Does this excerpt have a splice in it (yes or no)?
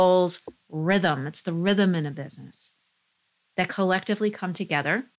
no